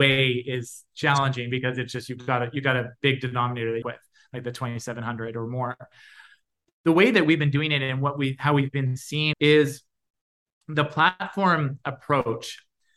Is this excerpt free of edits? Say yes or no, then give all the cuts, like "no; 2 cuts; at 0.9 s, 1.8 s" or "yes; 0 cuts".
no; 2 cuts; at 3.8 s, 9.3 s